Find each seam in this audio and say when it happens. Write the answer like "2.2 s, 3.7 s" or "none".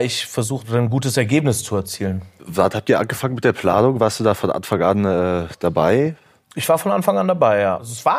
none